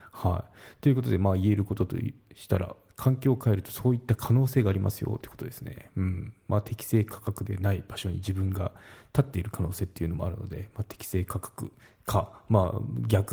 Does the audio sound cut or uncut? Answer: cut